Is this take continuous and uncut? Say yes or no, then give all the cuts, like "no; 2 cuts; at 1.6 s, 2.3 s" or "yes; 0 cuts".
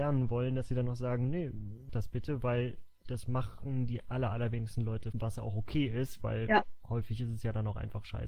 no; 2 cuts; at 1.9 s, 5.1 s